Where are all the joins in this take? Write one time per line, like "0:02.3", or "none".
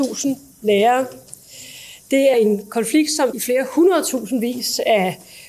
0:02.3
0:03.3